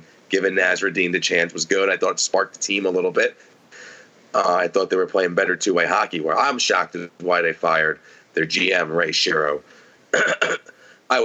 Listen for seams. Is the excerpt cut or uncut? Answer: uncut